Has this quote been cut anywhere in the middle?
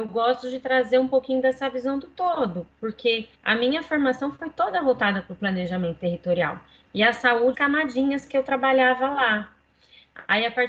yes; 2 cuts; at 3.3 s, 7.5 s

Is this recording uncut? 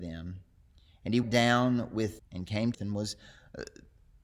no; 3 cuts; at 1.2 s, 2.2 s, 2.7 s

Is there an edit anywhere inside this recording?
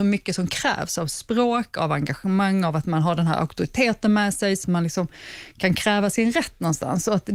yes; 1 cut; at 4.6 s

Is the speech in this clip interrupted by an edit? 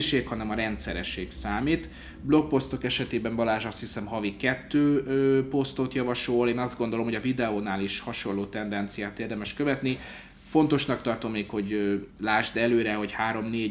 yes; 1 cut; at 12.1 s

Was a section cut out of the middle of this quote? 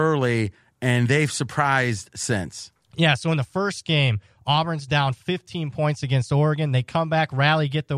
no; 0 cuts

